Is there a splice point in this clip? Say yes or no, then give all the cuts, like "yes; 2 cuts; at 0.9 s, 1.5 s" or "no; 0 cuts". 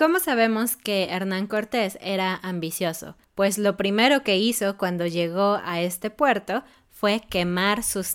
yes; 1 cut; at 3.2 s